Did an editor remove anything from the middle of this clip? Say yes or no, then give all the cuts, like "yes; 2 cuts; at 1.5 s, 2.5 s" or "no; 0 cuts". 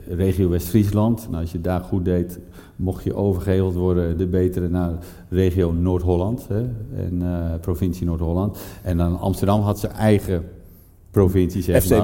no; 0 cuts